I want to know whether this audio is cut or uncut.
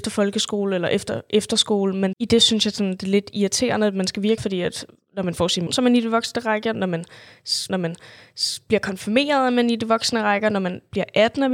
cut